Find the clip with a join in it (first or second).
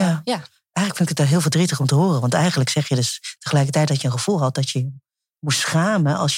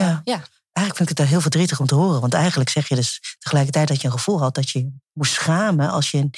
second